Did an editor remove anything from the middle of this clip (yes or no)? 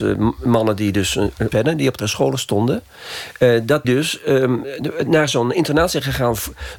yes